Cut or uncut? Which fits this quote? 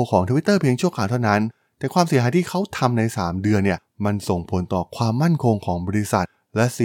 uncut